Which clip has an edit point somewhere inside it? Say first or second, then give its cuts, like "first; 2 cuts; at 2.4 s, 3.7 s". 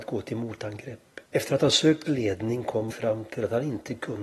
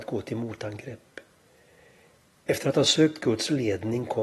first; 3 cuts; at 1.2 s, 2.1 s, 2.9 s